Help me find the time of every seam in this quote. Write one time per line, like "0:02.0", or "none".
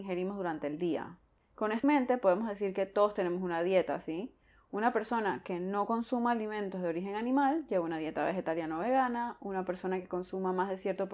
0:01.8